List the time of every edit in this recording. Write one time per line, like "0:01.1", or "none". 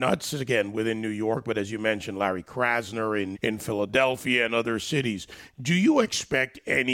0:03.3